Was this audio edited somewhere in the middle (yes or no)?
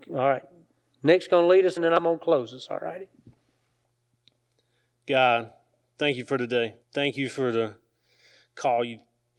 yes